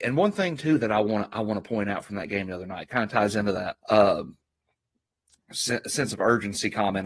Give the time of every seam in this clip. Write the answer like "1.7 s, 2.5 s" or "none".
3.8 s